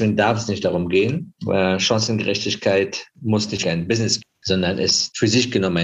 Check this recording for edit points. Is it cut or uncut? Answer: cut